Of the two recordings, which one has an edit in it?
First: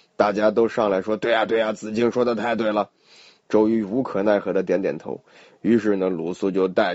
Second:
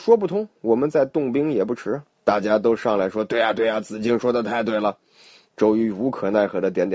second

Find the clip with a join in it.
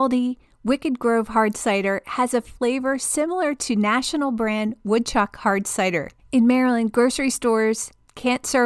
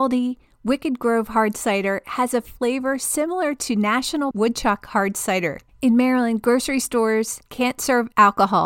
second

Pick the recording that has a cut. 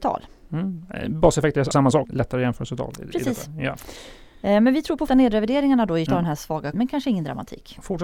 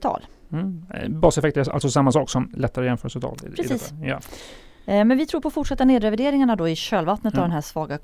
first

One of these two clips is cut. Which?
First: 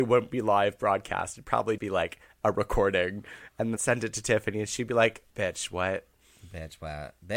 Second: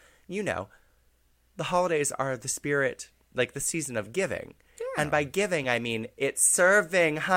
first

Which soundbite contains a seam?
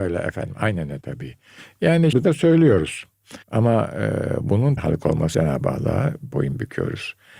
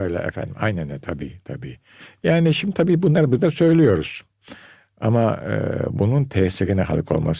first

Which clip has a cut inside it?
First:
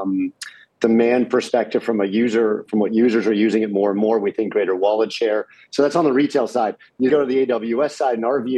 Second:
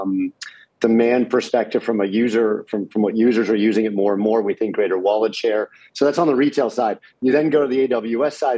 first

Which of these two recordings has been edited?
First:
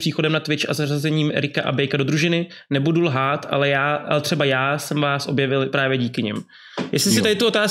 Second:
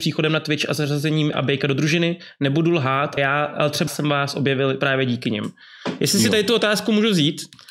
second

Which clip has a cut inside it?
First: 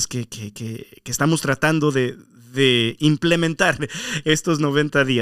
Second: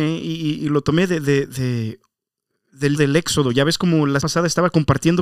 second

